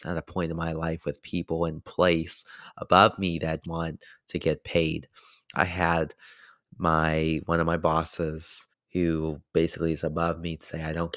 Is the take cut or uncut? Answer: cut